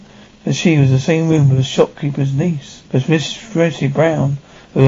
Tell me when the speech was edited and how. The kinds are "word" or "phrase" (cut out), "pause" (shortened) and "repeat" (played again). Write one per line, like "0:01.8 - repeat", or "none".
0:02.9 - pause